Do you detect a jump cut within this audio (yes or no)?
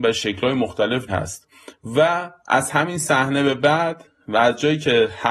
yes